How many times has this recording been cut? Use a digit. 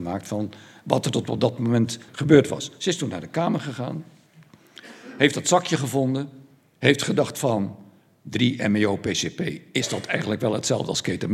1